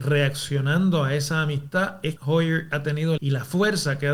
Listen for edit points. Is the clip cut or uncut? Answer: cut